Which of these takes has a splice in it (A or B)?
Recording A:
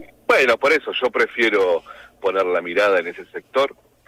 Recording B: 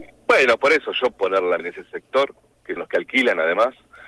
B